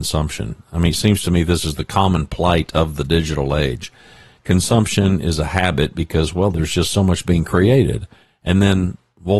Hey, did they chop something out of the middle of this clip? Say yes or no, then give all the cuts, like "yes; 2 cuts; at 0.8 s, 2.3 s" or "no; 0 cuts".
no; 0 cuts